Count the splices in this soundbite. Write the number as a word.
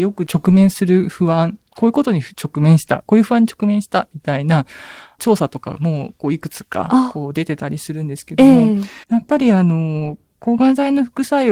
two